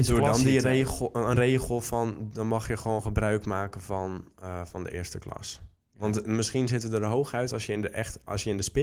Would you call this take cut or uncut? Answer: uncut